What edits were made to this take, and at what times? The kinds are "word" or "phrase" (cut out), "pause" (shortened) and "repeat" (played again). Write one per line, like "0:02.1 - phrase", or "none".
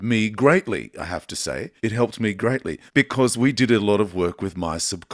0:01.8 - pause
0:02.9 - pause